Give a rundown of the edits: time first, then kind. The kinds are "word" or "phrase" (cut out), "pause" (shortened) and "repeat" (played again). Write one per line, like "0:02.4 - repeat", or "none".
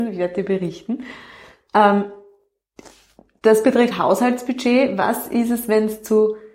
0:03.9 - word